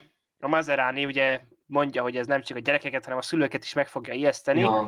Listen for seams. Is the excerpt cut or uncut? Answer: uncut